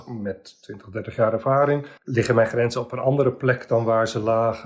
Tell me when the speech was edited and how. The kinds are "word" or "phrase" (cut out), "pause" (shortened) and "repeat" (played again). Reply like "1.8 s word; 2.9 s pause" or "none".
2.0 s pause